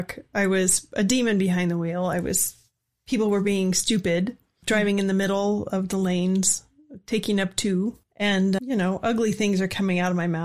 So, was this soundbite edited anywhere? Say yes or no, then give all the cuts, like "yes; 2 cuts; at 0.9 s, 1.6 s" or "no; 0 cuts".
yes; 1 cut; at 8.6 s